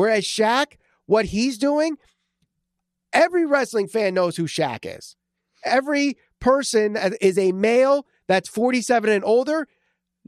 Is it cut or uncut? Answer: uncut